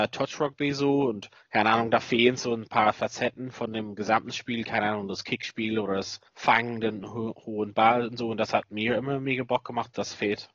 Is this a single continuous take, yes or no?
no